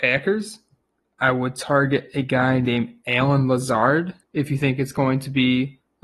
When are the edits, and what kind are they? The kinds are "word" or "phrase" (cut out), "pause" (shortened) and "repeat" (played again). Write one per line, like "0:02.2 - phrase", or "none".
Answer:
0:04.2 - pause